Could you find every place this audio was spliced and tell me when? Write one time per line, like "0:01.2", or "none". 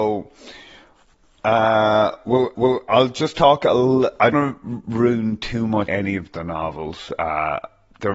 0:02.5
0:04.3
0:05.9